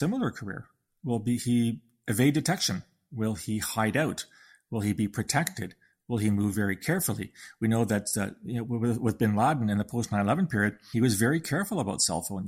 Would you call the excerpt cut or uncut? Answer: uncut